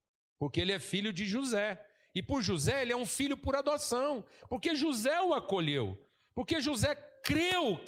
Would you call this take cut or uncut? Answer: uncut